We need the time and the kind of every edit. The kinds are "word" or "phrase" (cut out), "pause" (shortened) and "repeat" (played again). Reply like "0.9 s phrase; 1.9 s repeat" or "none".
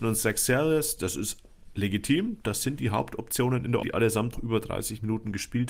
3.8 s word; 4.3 s word